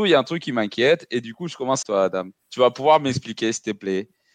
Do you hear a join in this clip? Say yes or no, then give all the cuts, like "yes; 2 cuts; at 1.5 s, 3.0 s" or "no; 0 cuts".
yes; 2 cuts; at 1.8 s, 2.4 s